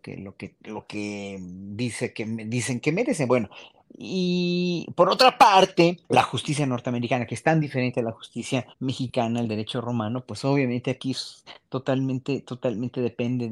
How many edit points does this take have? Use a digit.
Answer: 2